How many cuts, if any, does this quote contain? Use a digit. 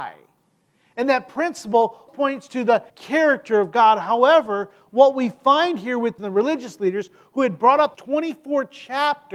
4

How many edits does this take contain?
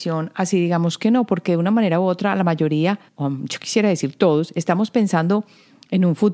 1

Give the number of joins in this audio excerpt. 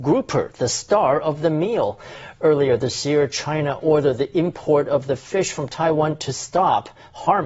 0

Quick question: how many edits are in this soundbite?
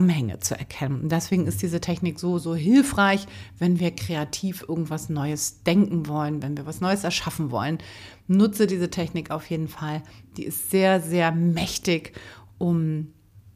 0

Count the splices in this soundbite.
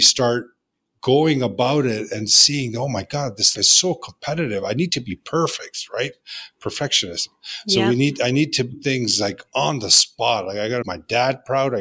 3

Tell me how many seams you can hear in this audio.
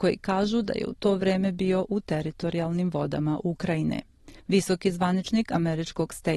1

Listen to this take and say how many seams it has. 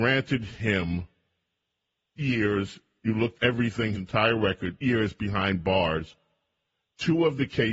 5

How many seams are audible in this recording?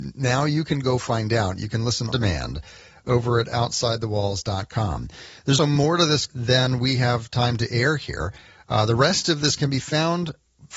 4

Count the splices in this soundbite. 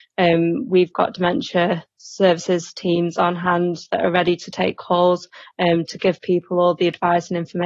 0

